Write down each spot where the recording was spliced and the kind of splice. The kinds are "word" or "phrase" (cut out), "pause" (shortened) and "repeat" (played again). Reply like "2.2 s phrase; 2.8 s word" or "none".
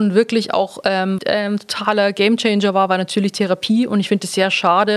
1.2 s phrase